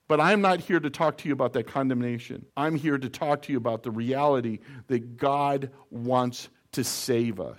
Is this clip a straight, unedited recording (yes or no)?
no